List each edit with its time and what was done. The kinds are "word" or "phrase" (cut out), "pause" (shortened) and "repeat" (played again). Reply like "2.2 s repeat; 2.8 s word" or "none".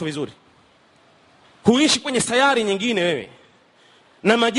1.4 s phrase